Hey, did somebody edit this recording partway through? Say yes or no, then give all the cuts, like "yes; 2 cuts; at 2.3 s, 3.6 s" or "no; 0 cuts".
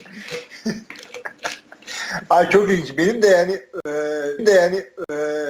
yes; 1 cut; at 4.4 s